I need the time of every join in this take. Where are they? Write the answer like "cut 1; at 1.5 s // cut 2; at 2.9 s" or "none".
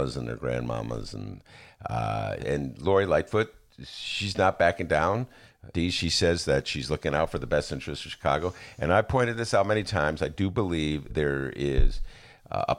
cut 1; at 2.4 s // cut 2; at 5.7 s // cut 3; at 11.1 s